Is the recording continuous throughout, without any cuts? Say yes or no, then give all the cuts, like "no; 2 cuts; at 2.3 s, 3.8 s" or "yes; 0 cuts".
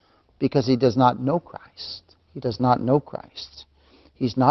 no; 1 cut; at 2.2 s